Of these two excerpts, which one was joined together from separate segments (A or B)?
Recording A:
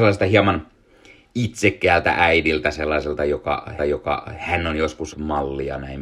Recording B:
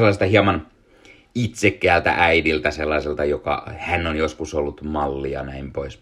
A